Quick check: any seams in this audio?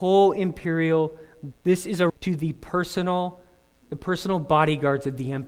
yes; 3 cuts; at 1.5 s, 2.1 s, 3.8 s

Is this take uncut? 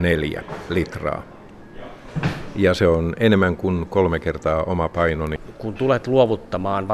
yes; 0 cuts

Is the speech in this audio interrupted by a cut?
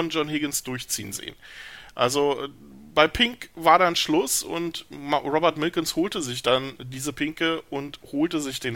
no; 0 cuts

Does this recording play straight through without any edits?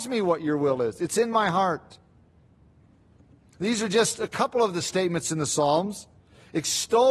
yes; 0 cuts

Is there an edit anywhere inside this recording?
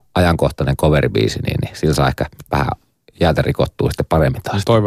no; 0 cuts

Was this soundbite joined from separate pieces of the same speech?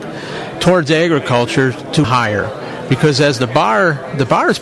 yes; 1 cut; at 2.0 s

